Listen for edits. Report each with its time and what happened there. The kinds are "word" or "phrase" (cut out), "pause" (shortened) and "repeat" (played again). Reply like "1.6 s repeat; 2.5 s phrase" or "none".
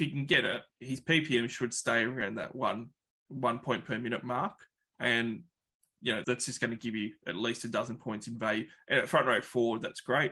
4.8 s pause; 6.2 s word